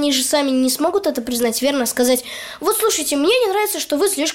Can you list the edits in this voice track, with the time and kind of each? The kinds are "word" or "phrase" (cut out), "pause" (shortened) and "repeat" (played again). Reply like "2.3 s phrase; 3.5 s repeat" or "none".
none

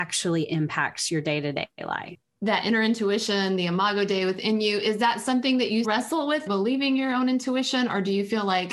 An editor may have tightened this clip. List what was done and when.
5.8 s word; 6.5 s phrase

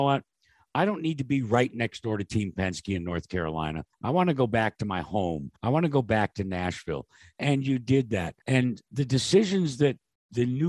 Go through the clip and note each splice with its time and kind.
3.9 s pause; 5.6 s pause; 8.4 s pause

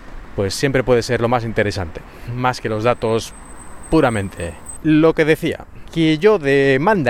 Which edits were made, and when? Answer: 4.8 s word

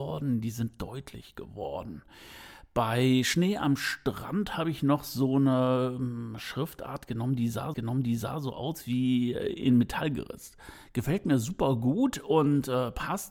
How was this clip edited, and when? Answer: 7.7 s repeat

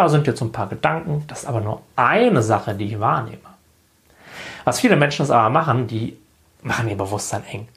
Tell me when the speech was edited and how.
none

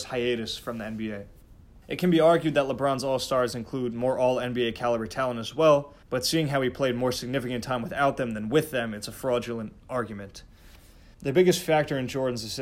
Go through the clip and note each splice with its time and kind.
1.8 s pause; 6.0 s pause; 11.1 s pause

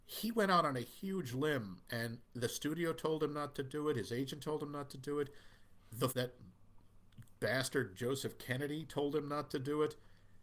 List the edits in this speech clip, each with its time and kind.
6.1 s word

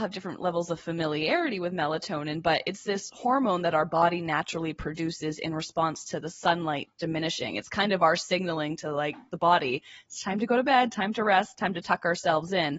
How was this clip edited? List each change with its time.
none

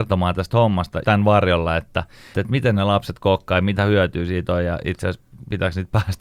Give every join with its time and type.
1.0 s word; 2.3 s word

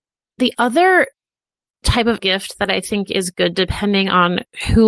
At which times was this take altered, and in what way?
2.2 s word

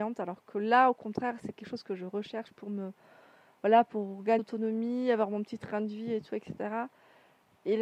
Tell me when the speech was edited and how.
4.4 s word

